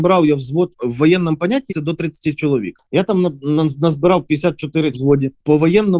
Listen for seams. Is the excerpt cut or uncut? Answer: cut